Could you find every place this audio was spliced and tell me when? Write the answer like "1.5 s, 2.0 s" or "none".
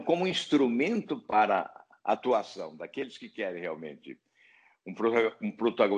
none